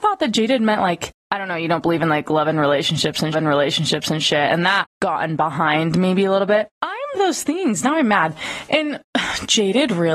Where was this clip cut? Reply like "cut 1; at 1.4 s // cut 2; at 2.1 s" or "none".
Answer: cut 1; at 3.3 s // cut 2; at 4.8 s // cut 3; at 7.1 s